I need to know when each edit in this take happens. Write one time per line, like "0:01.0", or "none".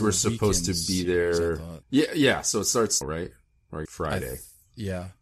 0:01.8
0:03.0
0:03.9